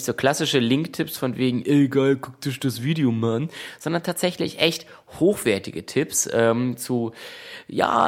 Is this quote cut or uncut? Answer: uncut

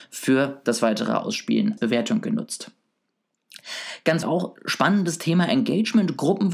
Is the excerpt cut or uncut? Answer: cut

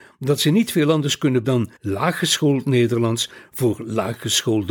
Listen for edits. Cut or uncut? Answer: cut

